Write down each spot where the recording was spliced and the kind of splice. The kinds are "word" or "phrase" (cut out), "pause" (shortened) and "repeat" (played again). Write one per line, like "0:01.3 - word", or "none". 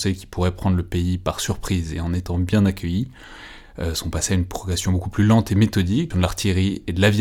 0:06.1 - phrase